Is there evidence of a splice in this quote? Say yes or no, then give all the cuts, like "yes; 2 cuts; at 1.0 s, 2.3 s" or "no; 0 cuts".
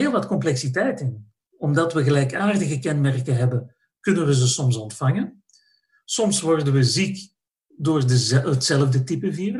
no; 0 cuts